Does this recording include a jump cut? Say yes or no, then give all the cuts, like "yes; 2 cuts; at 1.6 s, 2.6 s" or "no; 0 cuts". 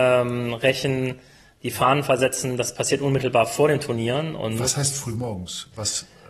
no; 0 cuts